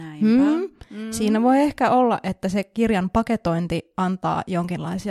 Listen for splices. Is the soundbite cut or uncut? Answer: uncut